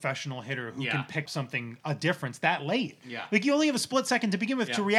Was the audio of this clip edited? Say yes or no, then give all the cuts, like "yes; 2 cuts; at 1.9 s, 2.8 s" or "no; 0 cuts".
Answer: yes; 1 cut; at 1.3 s